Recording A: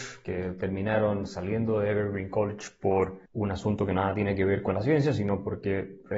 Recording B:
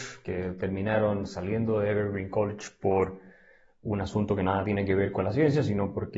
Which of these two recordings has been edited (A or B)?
A